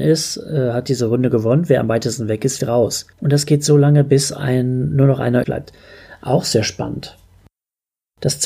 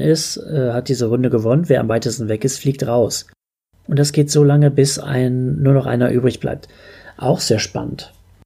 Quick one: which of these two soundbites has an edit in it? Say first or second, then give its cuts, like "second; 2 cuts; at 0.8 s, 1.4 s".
first; 3 cuts; at 2.6 s, 3.1 s, 5.4 s